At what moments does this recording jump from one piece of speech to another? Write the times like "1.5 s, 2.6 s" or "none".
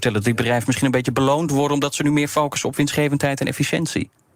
none